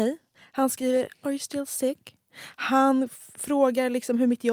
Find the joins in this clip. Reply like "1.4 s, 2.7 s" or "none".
none